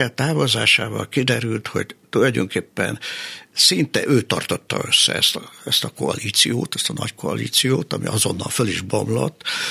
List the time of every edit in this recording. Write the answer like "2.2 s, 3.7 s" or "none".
none